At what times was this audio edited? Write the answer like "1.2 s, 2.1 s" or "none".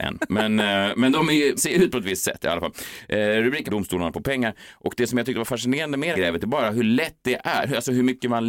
1.6 s, 3.7 s, 6.1 s

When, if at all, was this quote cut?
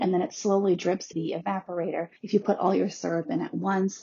1.1 s, 2.2 s

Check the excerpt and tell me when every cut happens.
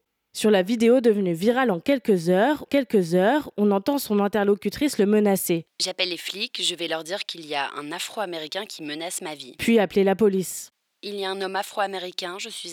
2.7 s

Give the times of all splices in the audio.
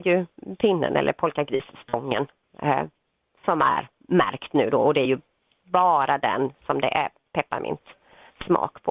none

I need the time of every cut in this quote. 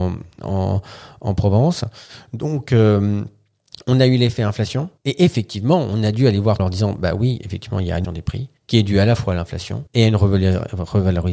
5.0 s, 6.6 s, 8.0 s, 8.6 s, 9.9 s

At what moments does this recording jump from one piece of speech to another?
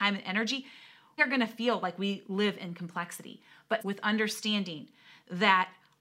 1.2 s, 3.8 s

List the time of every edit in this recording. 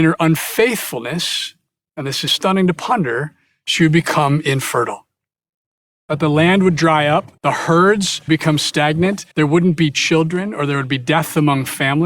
2.3 s, 7.4 s, 8.3 s, 9.3 s

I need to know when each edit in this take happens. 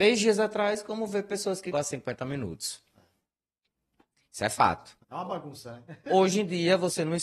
1.7 s, 5.0 s

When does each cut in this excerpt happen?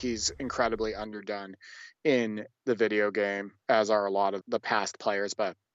4.4 s

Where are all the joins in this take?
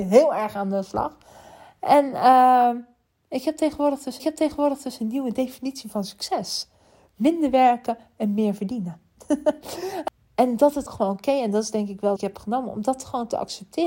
4.2 s, 10.9 s, 12.2 s

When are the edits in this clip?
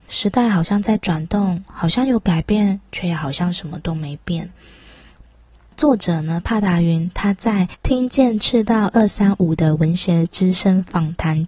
none

